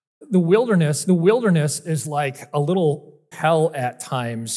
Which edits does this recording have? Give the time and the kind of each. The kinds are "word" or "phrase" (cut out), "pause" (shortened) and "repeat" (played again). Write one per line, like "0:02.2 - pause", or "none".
0:01.1 - repeat
0:03.3 - phrase